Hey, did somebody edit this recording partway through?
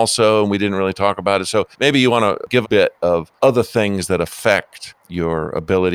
yes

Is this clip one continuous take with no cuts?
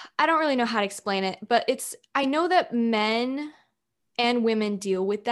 yes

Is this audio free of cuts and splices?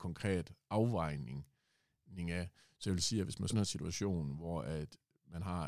no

